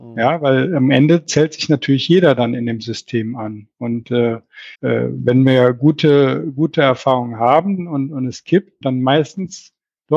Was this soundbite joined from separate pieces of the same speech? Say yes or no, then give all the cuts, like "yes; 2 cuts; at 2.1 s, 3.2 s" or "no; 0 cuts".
yes; 2 cuts; at 4.7 s, 8.8 s